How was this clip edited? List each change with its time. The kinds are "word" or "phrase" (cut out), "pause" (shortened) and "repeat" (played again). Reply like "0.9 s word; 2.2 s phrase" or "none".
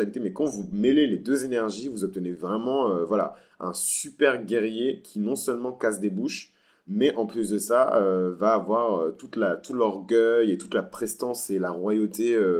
none